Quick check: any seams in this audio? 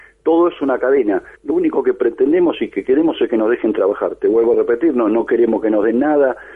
yes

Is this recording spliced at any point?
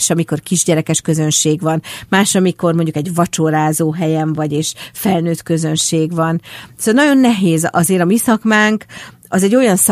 no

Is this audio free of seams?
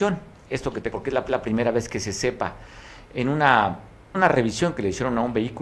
no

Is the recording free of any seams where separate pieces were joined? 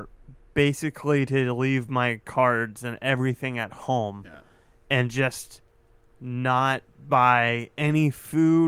yes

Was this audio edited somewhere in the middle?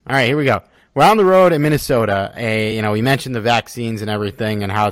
no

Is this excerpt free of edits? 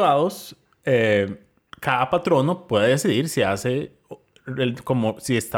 yes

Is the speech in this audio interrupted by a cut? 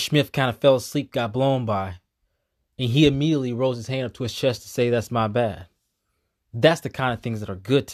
no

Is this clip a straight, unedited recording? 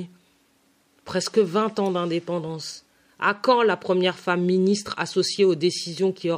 yes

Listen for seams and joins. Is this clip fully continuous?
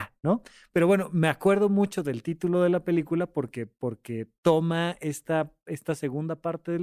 yes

